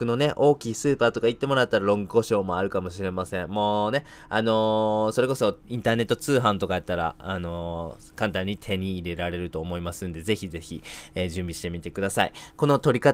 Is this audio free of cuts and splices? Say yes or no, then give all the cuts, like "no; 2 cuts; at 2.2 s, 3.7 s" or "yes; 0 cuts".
no; 1 cut; at 5.6 s